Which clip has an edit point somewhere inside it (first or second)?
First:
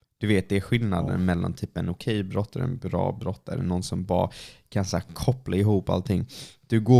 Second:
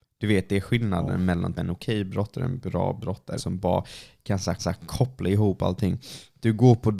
second